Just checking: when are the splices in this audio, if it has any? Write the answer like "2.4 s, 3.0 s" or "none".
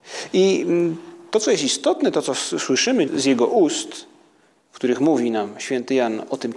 3.1 s